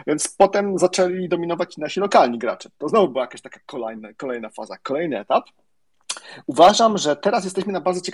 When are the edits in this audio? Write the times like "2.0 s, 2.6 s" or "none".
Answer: none